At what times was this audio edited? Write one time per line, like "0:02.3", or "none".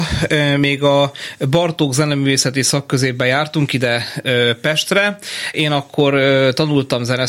0:05.5